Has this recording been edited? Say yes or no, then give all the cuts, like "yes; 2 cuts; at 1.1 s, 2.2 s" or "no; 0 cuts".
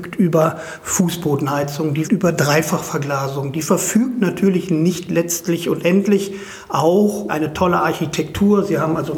yes; 2 cuts; at 2.0 s, 7.3 s